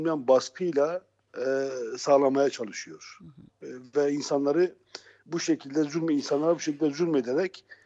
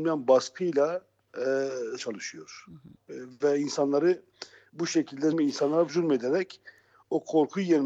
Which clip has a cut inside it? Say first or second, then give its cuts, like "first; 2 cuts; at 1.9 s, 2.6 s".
second; 3 cuts; at 2.0 s, 5.3 s, 5.9 s